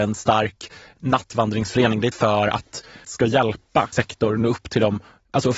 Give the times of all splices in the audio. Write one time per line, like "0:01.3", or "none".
0:02.1
0:03.0
0:03.9